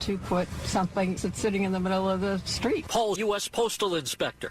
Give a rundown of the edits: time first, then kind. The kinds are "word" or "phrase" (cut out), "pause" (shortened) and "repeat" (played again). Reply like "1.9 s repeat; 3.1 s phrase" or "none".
1.2 s phrase; 3.2 s phrase